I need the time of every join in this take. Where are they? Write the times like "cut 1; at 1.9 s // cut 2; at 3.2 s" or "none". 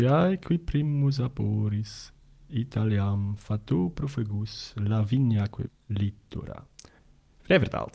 cut 1; at 5.7 s